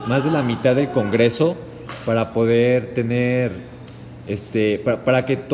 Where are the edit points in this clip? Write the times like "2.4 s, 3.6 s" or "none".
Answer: none